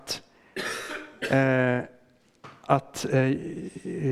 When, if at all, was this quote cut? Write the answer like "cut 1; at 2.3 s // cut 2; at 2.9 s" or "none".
cut 1; at 2.7 s